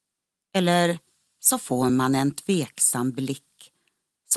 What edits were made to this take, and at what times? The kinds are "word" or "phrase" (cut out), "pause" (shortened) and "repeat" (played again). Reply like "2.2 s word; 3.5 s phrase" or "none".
none